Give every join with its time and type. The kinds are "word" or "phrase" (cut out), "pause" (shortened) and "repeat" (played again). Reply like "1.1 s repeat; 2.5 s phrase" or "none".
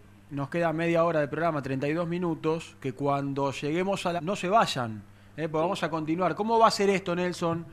4.2 s word